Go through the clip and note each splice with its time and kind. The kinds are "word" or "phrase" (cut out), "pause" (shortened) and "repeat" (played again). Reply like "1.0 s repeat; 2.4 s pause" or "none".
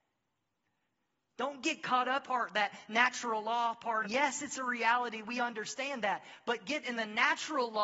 2.2 s phrase; 4.0 s phrase; 6.8 s word